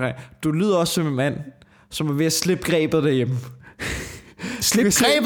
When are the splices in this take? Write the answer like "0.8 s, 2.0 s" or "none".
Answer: none